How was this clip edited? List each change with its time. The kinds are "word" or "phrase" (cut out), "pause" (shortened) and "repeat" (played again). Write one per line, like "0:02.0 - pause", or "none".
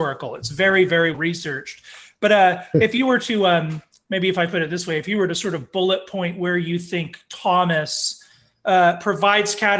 0:01.1 - word